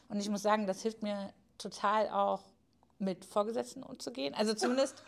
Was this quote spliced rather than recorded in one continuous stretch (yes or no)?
no